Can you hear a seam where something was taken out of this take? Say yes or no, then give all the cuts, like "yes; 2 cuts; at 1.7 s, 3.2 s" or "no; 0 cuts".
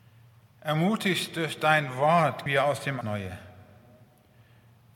yes; 2 cuts; at 2.5 s, 3.0 s